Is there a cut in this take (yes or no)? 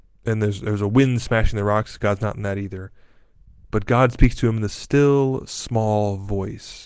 no